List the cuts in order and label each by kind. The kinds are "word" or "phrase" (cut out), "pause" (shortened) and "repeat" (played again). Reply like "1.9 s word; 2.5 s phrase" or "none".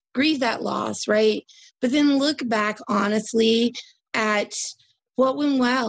none